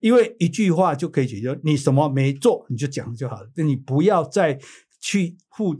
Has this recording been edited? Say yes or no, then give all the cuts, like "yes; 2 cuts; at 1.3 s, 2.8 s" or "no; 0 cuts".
no; 0 cuts